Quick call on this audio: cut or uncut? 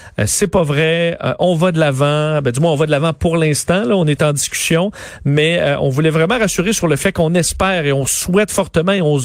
uncut